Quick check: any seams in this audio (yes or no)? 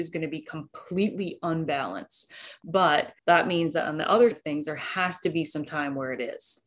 yes